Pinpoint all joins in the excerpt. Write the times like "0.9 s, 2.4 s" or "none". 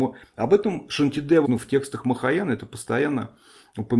1.4 s